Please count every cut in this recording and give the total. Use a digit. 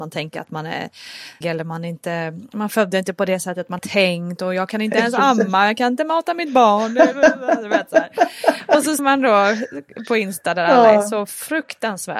3